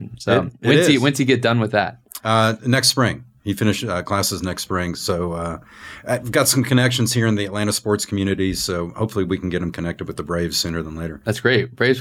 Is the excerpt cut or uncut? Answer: uncut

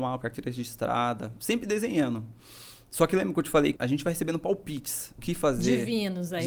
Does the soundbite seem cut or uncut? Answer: cut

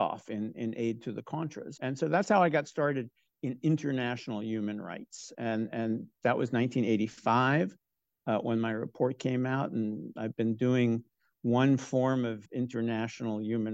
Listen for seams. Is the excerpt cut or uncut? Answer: cut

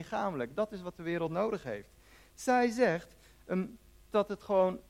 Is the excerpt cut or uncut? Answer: uncut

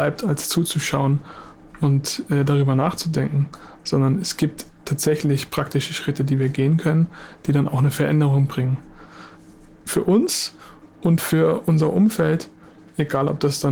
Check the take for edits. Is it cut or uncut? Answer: uncut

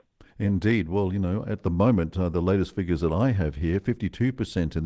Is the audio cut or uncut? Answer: uncut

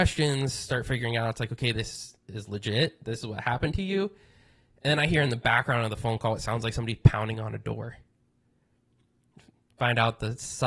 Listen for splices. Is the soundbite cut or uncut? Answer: uncut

